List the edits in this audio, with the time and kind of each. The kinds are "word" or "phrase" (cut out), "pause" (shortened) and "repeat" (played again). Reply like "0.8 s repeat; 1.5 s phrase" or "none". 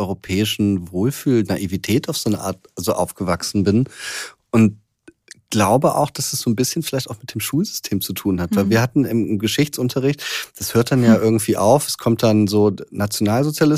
none